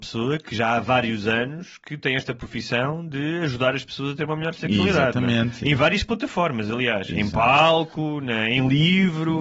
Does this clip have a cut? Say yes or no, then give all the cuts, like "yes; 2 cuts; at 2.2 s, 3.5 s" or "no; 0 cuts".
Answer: no; 0 cuts